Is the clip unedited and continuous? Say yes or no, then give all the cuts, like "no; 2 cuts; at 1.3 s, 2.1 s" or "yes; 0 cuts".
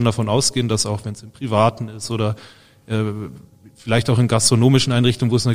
yes; 0 cuts